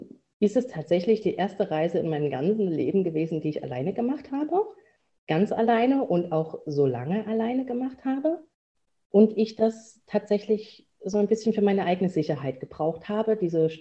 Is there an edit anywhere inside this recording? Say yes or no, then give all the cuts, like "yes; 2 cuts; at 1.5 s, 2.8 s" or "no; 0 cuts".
no; 0 cuts